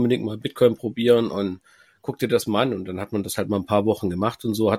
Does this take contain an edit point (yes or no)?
no